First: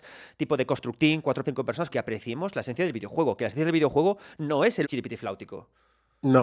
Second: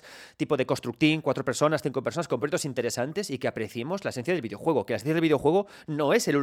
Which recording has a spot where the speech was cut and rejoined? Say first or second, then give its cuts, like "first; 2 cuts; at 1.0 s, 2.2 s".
first; 3 cuts; at 1.4 s, 1.9 s, 4.8 s